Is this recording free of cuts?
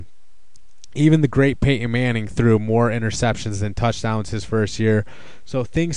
yes; 0 cuts

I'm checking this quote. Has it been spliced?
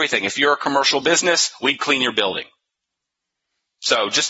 no; 0 cuts

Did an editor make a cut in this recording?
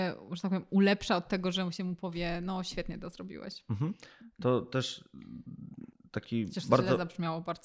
yes; 1 cut; at 5.9 s

